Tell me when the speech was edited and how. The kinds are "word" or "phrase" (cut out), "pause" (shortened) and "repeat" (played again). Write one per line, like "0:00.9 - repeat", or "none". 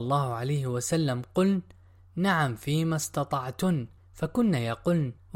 none